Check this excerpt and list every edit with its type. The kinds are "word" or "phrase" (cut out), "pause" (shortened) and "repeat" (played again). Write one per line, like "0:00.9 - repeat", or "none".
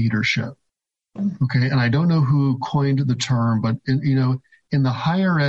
none

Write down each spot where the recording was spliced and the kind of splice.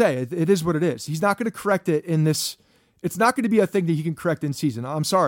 none

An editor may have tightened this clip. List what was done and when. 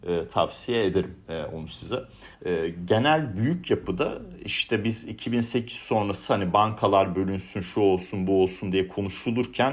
0:02.3 - pause

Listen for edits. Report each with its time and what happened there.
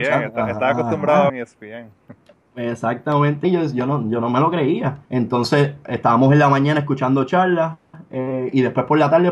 0:01.3 - word
0:03.4 - phrase
0:05.0 - pause

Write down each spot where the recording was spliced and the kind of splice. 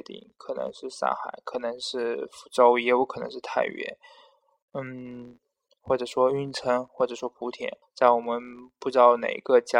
0:05.7 - pause
0:07.8 - pause

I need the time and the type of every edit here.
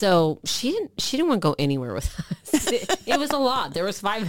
0:02.6 - word

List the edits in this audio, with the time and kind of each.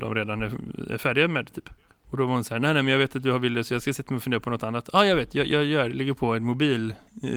0:01.9 - pause

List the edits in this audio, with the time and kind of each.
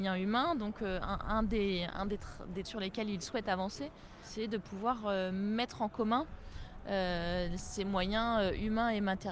0:01.9 - phrase
0:02.6 - word

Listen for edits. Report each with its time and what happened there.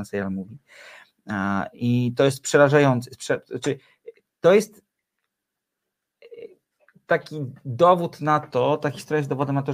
none

